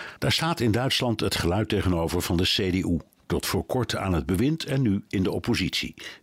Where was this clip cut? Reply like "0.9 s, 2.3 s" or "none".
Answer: none